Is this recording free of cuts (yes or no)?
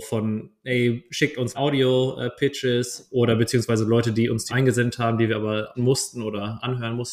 no